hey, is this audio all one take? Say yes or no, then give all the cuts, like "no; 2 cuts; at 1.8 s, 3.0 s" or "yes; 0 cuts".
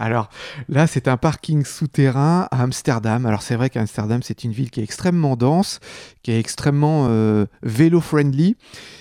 yes; 0 cuts